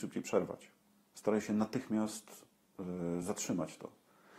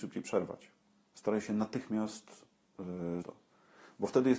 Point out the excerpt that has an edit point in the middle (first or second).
second